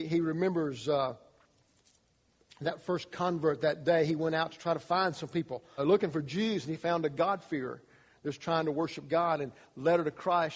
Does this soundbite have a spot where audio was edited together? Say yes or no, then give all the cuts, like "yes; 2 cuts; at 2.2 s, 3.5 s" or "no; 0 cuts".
yes; 1 cut; at 5.8 s